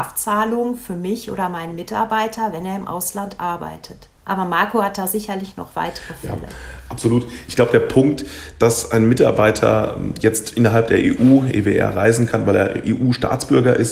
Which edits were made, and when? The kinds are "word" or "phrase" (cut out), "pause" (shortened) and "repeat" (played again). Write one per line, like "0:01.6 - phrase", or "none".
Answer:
0:04.2 - pause